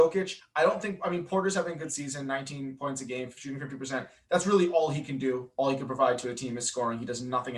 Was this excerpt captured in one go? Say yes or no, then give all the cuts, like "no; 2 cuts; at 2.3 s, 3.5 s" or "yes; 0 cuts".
yes; 0 cuts